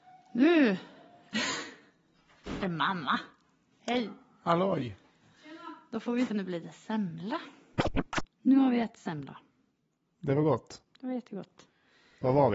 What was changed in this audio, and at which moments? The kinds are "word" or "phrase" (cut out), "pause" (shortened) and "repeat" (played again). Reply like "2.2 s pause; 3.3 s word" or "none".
2.6 s word; 6.3 s word